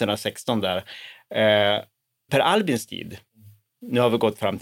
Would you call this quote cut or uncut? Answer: cut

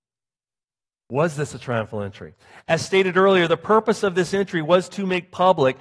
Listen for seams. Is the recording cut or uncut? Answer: uncut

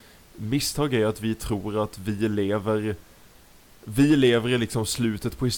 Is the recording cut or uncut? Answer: uncut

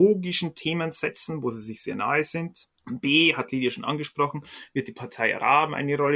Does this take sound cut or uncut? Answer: cut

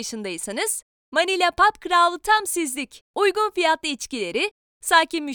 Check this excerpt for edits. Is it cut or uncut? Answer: cut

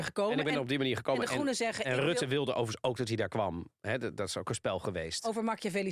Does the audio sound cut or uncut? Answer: uncut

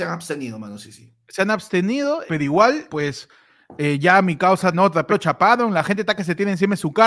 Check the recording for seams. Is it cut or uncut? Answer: cut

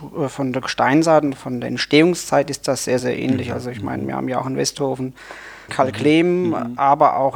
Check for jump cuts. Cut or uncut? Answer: cut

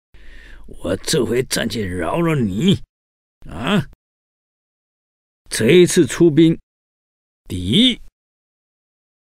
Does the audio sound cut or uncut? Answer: uncut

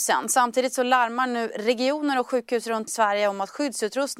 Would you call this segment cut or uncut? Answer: cut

